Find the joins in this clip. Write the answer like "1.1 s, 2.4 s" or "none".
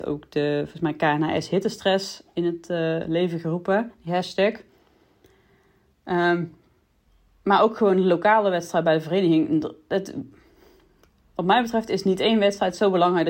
none